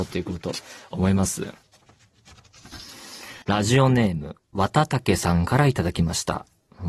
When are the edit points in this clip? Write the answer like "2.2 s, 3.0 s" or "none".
3.4 s